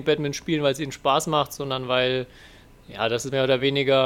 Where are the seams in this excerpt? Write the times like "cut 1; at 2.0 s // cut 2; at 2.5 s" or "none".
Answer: none